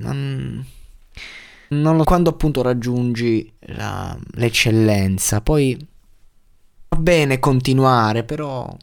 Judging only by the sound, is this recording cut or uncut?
cut